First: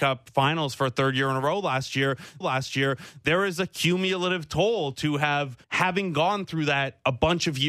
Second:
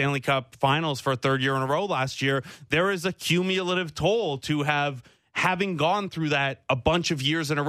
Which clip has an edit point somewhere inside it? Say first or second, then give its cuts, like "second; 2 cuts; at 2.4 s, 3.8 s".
first; 2 cuts; at 2.4 s, 5.6 s